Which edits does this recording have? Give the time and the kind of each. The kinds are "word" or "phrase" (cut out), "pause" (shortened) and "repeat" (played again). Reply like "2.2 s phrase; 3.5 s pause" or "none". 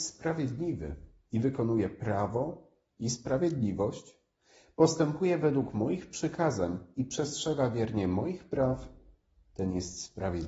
none

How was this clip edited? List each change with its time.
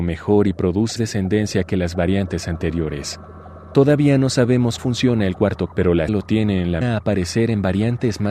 1.0 s word; 4.8 s word; 5.7 s word; 6.1 s word; 6.8 s phrase

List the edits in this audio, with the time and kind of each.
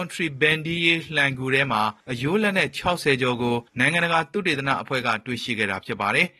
2.0 s pause; 3.7 s pause

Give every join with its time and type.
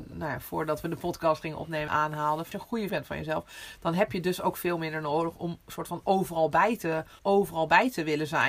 1.9 s word; 2.5 s word; 2.9 s word; 7.2 s phrase

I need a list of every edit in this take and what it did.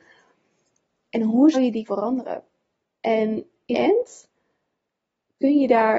1.5 s word; 1.8 s word; 3.7 s word

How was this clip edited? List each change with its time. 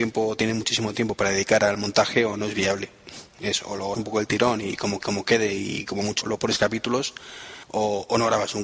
3.9 s word; 5.0 s repeat; 6.2 s word; 7.6 s pause

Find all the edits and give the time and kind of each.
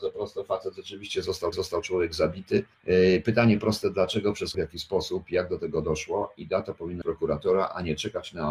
1.5 s repeat; 2.7 s pause; 4.5 s word; 7.0 s word

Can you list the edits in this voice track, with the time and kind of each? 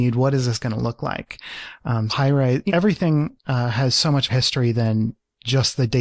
2.1 s word; 2.7 s word; 4.3 s word

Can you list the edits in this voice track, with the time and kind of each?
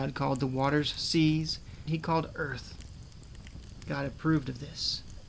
1.9 s phrase

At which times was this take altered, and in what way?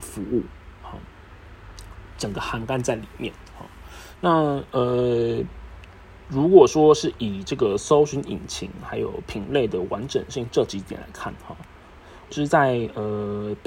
12.3 s phrase

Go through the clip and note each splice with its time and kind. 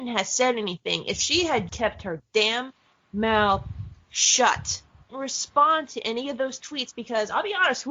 1.7 s word; 5.1 s phrase

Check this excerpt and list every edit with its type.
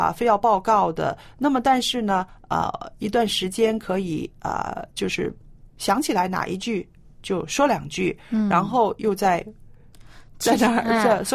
none

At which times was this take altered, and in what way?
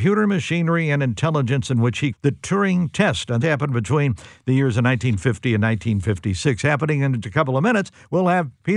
2.1 s word; 3.4 s word; 7.2 s word

